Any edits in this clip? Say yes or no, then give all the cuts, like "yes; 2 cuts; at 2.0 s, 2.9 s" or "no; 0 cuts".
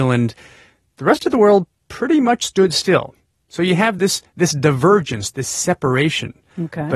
no; 0 cuts